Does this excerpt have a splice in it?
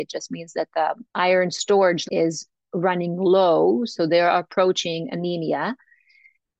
yes; 2 cuts; at 1.1 s, 2.1 s

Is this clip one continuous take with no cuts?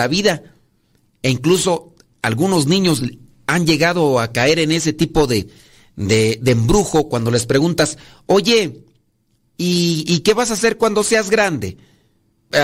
yes; 0 cuts

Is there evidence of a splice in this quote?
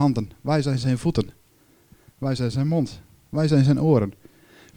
no; 0 cuts

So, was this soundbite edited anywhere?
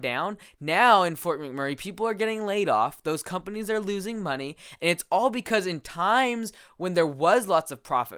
no; 0 cuts

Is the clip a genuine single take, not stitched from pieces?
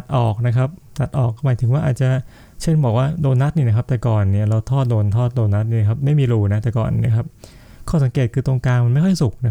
yes; 0 cuts

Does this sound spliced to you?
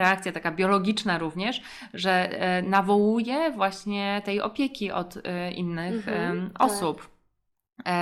no; 0 cuts

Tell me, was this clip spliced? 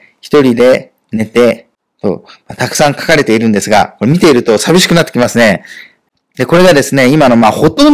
no; 0 cuts

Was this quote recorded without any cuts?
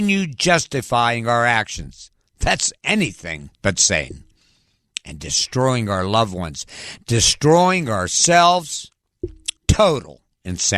no; 2 cuts; at 3.5 s, 9.6 s

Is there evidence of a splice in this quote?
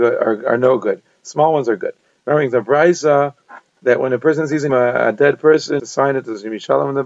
yes; 2 cuts; at 4.7 s, 5.8 s

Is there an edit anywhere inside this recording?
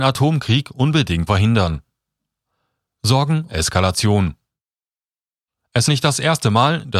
yes; 3 cuts; at 1.3 s, 3.5 s, 5.9 s

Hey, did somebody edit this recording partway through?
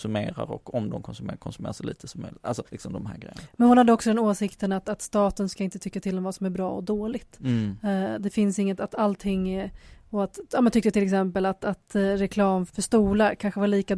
yes; 2 cuts; at 2.7 s, 12.7 s

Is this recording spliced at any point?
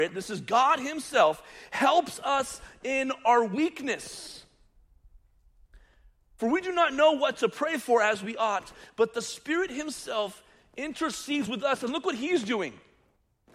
no; 0 cuts

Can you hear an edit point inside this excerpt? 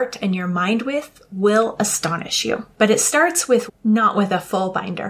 yes; 2 cuts; at 2.7 s, 3.7 s

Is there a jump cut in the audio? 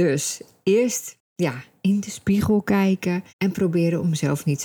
yes; 1 cut; at 3.3 s

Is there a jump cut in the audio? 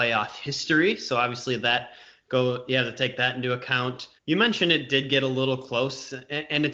yes; 1 cut; at 4.2 s

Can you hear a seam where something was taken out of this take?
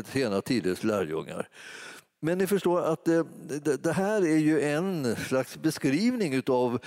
no; 0 cuts

